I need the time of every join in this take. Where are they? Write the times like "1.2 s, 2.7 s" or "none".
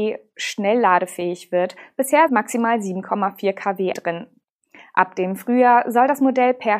2.3 s, 3.9 s